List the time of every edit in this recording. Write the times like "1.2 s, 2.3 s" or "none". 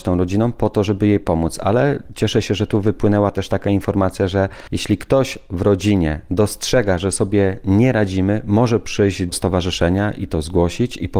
9.3 s